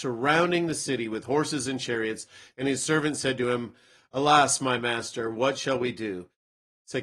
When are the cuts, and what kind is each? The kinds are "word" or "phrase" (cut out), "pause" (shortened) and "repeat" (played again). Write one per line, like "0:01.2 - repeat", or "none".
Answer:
none